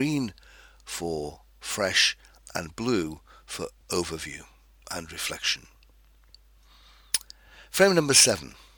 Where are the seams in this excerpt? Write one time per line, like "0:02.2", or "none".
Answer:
none